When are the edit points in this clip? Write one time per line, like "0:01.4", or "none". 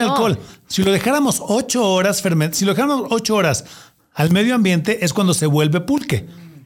none

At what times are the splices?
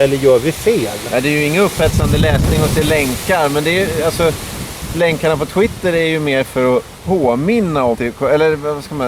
0:07.9

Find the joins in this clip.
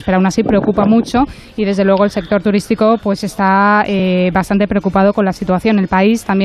none

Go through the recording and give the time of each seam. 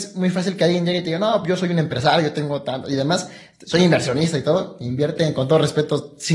none

